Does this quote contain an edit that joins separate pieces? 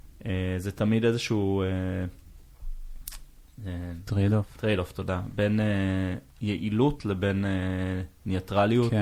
yes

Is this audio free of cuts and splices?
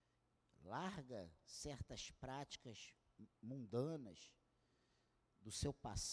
yes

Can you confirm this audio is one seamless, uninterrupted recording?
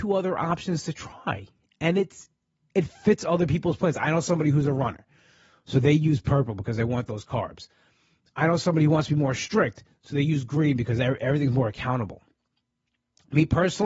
yes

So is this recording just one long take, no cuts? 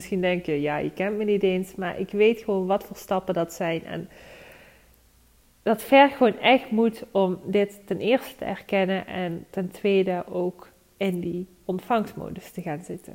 yes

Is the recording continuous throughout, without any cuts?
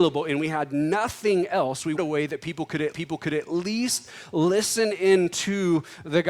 no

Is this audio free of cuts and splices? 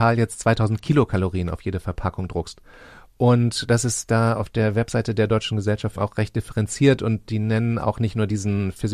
no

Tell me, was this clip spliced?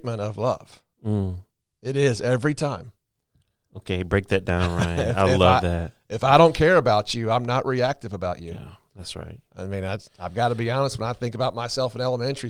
no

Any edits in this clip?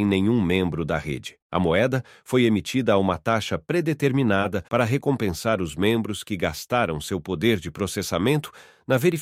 yes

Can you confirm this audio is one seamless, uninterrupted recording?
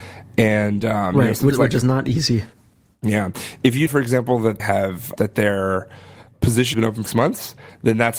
no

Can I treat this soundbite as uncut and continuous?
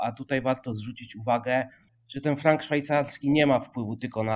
no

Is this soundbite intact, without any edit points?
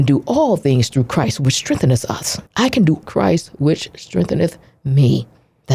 no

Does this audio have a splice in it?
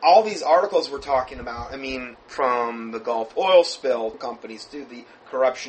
yes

